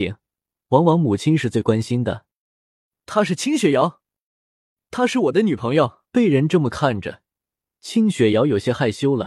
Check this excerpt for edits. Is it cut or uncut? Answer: cut